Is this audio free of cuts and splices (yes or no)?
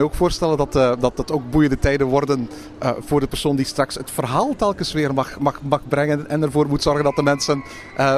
yes